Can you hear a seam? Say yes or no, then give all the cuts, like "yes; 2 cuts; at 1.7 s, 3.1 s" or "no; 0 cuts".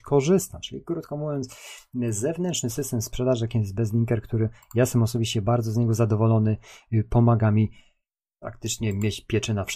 no; 0 cuts